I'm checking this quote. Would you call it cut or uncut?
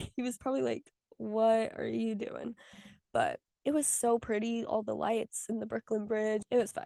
uncut